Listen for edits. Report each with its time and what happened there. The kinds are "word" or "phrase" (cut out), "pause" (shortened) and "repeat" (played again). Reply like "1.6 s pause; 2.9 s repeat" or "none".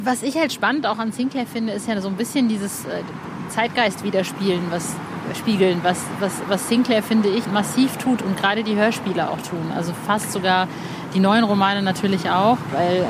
7.4 s word